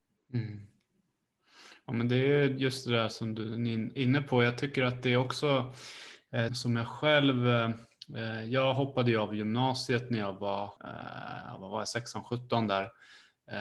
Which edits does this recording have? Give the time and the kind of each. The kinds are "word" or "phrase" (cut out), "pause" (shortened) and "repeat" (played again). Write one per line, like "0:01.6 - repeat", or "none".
0:06.5 - word
0:10.8 - pause